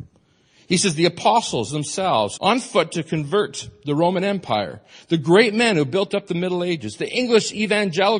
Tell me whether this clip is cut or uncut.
cut